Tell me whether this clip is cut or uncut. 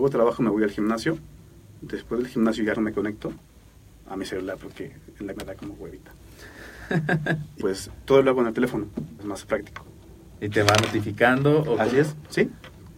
cut